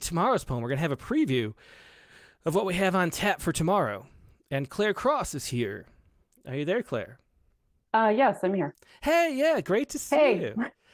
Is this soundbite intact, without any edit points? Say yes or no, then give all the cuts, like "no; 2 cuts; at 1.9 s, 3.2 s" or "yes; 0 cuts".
yes; 0 cuts